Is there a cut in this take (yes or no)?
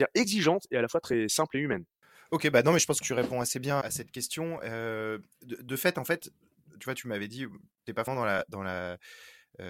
yes